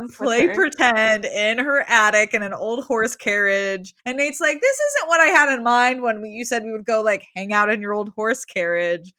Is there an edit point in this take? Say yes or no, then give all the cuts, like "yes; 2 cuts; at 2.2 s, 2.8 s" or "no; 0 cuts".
yes; 1 cut; at 4.0 s